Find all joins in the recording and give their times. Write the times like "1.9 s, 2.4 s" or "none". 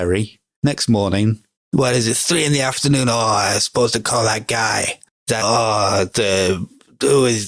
1.6 s, 5.4 s

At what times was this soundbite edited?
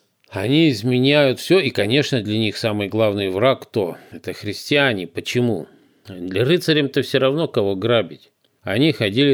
none

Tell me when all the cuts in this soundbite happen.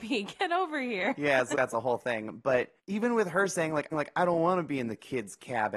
1.5 s, 2.8 s, 3.9 s

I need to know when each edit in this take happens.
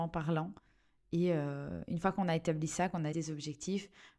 3.1 s

